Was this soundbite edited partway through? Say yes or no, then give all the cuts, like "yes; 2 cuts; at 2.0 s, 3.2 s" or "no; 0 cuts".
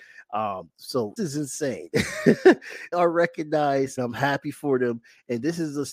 yes; 3 cuts; at 1.2 s, 2.9 s, 4.0 s